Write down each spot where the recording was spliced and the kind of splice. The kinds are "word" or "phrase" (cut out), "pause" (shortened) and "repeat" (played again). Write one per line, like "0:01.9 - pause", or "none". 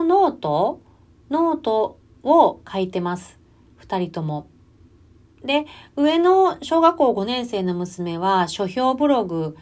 none